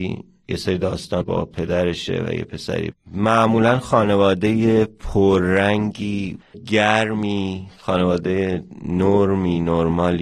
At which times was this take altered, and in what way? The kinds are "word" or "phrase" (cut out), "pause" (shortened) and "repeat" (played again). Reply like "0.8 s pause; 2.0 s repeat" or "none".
1.2 s phrase; 2.9 s phrase; 6.5 s word